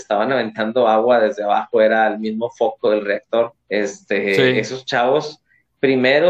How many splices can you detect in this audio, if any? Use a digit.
1